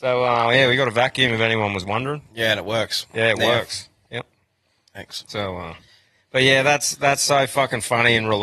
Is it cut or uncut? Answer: uncut